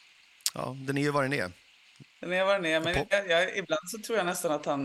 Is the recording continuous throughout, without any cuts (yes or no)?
no